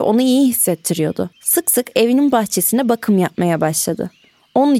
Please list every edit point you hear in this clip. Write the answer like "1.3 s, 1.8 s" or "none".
1.3 s